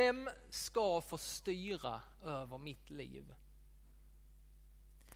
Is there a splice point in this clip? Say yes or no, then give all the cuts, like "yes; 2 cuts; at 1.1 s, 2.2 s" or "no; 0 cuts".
no; 0 cuts